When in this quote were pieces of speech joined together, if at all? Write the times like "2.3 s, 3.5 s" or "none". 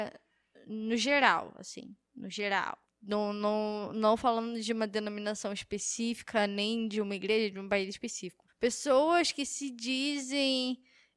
2.0 s, 2.8 s, 8.5 s